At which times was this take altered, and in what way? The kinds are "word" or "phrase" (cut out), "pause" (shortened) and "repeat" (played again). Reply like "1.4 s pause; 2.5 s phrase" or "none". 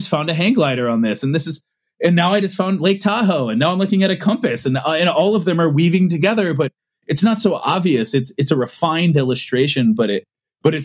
none